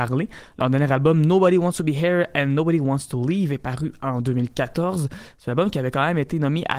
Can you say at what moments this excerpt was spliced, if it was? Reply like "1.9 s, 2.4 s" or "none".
none